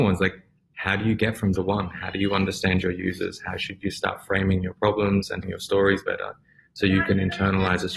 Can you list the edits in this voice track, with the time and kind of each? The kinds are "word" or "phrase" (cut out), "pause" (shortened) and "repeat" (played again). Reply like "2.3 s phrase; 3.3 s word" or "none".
1.6 s phrase; 5.4 s word